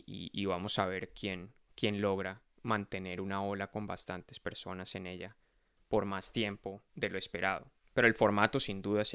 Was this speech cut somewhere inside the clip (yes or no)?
yes